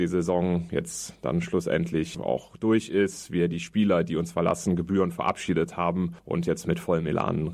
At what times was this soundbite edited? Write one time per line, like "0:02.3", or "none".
none